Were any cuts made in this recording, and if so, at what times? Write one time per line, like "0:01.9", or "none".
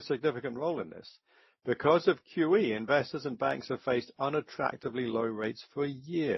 none